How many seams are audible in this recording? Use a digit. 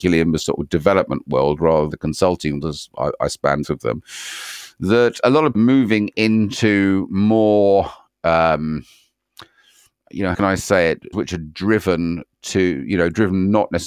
7